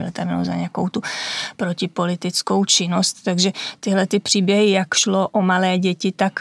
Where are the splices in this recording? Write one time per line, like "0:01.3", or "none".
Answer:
none